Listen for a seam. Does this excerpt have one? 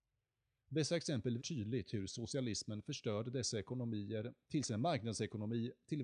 yes; 1 cut; at 1.4 s

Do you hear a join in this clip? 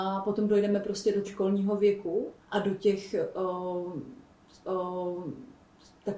yes; 3 cuts; at 1.2 s, 2.4 s, 4.6 s

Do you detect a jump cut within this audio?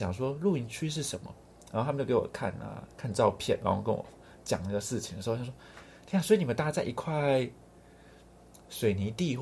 no; 0 cuts

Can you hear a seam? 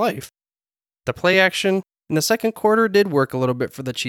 no; 0 cuts

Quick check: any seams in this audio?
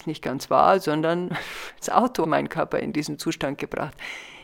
yes; 2 cuts; at 1.8 s, 2.2 s

